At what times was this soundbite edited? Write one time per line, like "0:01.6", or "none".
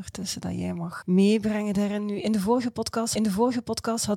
0:01.0
0:03.2